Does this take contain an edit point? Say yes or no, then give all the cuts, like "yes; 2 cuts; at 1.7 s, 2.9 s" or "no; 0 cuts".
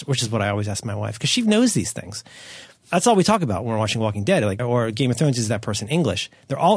yes; 1 cut; at 4.6 s